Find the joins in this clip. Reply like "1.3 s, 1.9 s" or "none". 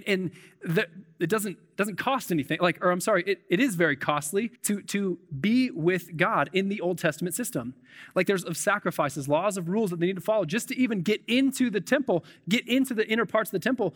4.6 s, 8.4 s